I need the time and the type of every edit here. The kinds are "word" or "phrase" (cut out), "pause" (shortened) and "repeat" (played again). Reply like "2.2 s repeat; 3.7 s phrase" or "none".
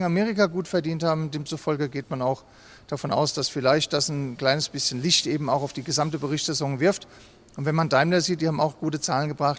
none

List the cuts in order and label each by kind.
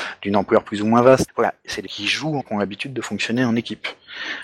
1.3 s word; 1.9 s word; 2.4 s word

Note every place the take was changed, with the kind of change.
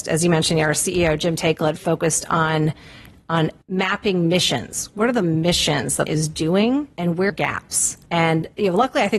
1.8 s word; 3.6 s pause; 6.1 s phrase; 6.9 s pause; 7.3 s phrase; 8.1 s pause

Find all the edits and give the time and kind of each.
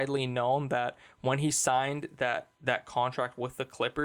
2.5 s pause

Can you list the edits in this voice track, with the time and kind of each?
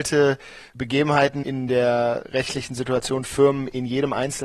3.2 s word

